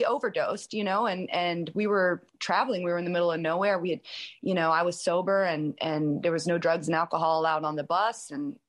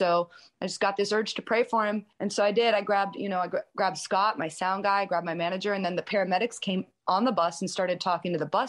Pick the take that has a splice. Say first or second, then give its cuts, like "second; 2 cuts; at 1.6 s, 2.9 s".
second; 1 cut; at 2.1 s